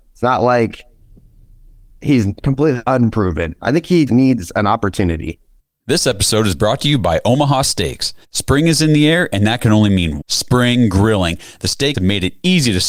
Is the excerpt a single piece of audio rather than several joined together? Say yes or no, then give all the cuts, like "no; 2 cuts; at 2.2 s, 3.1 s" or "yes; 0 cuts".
no; 5 cuts; at 4.1 s, 5.6 s, 8.2 s, 10.2 s, 11.9 s